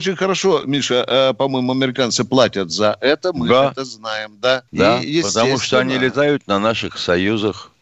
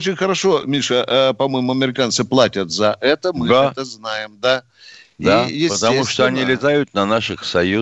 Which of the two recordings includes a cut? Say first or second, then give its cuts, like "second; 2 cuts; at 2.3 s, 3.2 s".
first; 1 cut; at 4.7 s